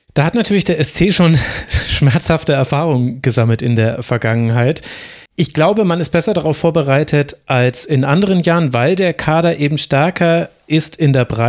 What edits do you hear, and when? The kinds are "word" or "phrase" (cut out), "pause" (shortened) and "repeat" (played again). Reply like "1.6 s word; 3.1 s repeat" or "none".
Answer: 5.3 s pause